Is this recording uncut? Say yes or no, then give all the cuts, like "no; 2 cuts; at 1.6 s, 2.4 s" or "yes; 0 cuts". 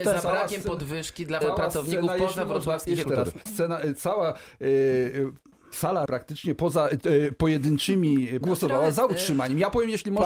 no; 5 cuts; at 1.4 s, 3.0 s, 3.5 s, 6.1 s, 8.4 s